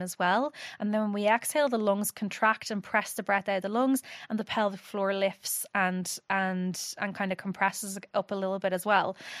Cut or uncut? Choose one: uncut